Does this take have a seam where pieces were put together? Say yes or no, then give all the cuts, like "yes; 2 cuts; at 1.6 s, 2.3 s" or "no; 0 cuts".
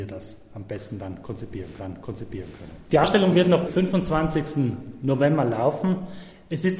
yes; 2 cuts; at 1.8 s, 3.7 s